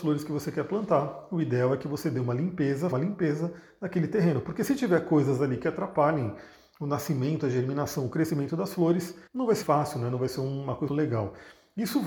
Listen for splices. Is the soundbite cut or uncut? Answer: cut